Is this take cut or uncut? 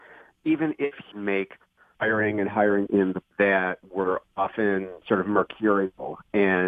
cut